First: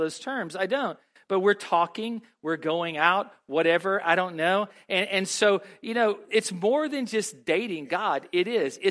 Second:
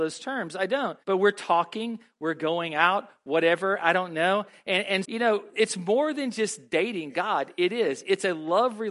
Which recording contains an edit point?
second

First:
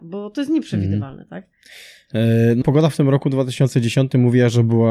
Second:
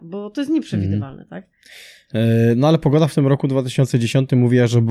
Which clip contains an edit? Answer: first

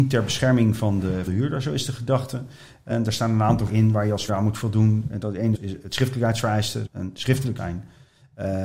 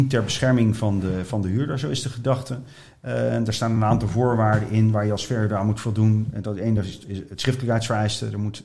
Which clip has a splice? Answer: first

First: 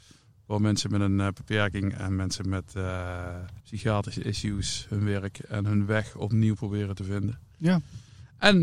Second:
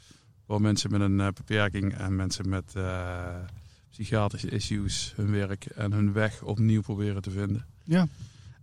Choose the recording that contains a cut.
first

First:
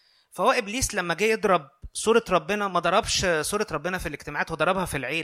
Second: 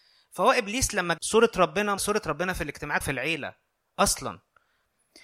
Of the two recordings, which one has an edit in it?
second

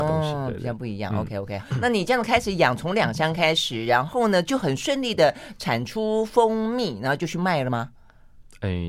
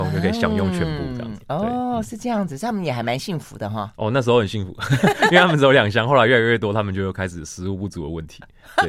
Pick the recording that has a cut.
first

